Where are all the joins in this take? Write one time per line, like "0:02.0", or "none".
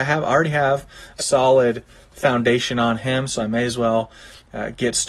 0:01.2

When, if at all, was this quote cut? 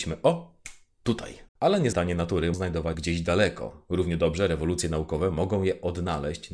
0:01.5
0:01.9
0:02.5
0:02.9

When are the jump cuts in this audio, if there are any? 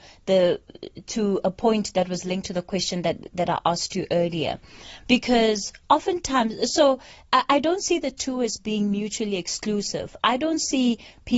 none

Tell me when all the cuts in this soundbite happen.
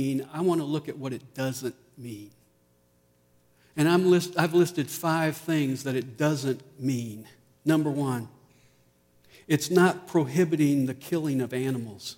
none

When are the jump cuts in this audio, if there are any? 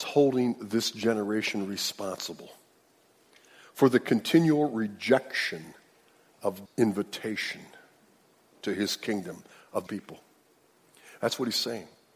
0:06.7
0:09.9

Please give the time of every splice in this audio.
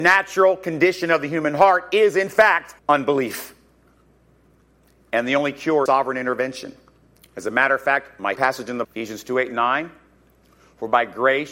0:02.8
0:05.9
0:07.1
0:08.4
0:08.8

